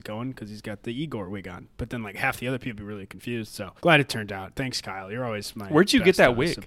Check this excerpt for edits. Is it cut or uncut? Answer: cut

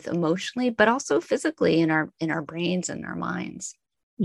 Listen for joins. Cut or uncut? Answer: uncut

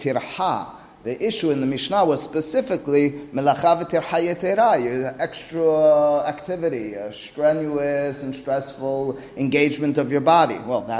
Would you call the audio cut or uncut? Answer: uncut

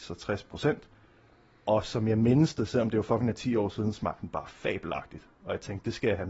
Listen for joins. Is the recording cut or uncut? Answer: uncut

